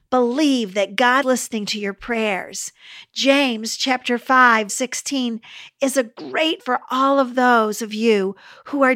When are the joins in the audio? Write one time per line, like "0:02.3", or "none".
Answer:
0:01.2
0:04.7
0:06.6